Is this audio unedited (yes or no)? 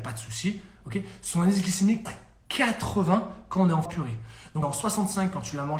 no